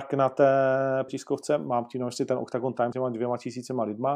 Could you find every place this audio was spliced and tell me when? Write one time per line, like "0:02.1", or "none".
0:01.1
0:02.9